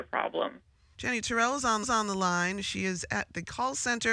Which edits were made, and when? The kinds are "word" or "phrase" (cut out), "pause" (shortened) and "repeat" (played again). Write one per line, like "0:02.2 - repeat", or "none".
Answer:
0:01.8 - repeat